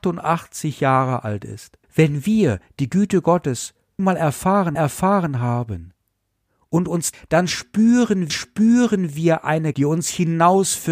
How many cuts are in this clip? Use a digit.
6